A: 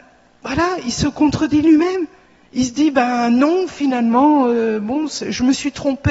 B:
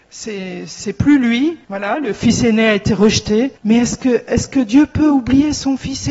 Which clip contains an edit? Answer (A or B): B